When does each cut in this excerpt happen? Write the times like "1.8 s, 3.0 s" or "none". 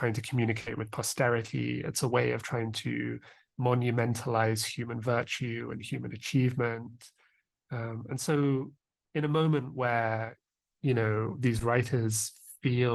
none